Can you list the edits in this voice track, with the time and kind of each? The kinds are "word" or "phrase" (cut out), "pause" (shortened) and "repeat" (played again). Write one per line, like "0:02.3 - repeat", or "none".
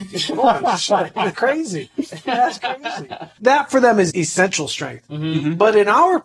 0:01.3 - word
0:04.1 - word